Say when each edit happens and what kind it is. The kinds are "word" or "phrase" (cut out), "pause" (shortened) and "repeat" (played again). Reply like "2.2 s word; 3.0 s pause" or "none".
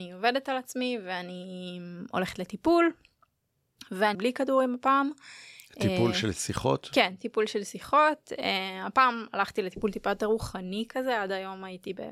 4.1 s phrase